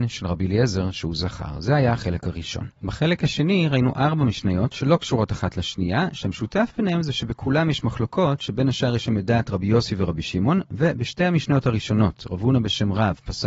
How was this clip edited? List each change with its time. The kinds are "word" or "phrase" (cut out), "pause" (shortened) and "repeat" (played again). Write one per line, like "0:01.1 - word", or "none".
0:02.8 - pause